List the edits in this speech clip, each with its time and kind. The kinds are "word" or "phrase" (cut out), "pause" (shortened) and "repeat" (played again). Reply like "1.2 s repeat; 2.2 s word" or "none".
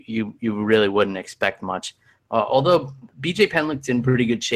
none